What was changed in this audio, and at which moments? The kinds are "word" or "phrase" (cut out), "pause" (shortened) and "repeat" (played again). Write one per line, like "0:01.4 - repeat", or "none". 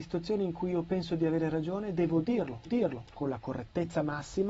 0:02.7 - repeat

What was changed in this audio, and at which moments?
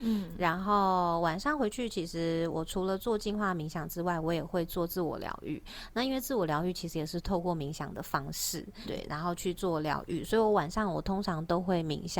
0:08.8 - word

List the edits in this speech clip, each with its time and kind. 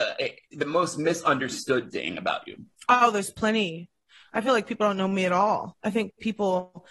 none

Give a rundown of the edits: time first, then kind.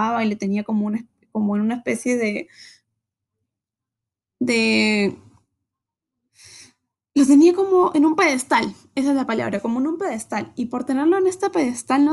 none

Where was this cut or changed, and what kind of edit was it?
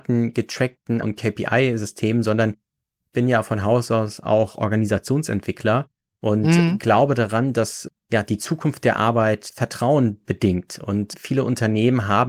0:01.0 - word

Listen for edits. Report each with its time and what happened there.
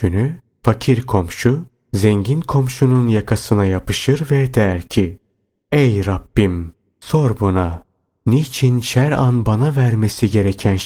none

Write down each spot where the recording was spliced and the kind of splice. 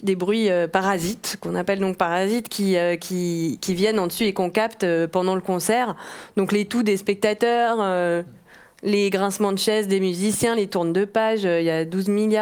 none

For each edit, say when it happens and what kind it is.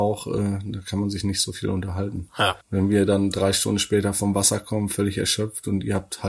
0:02.6 - pause

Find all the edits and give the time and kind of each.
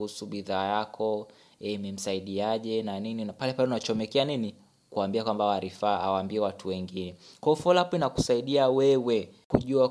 none

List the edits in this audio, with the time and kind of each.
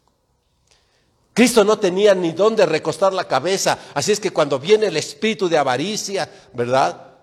none

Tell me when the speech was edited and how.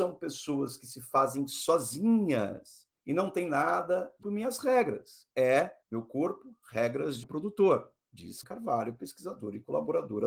0:03.0 - pause
0:04.2 - phrase
0:05.8 - pause
0:07.2 - word
0:08.4 - word

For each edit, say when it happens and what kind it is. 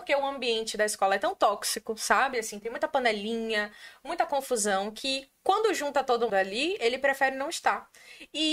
0:06.3 - word

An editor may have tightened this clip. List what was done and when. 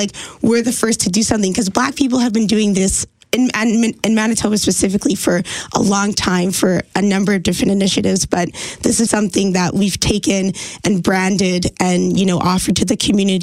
0:09.1 - word

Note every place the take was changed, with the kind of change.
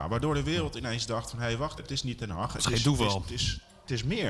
0:01.8 - word

